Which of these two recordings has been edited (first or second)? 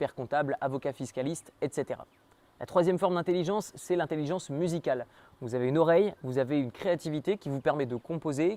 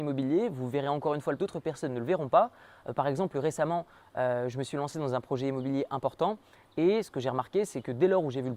second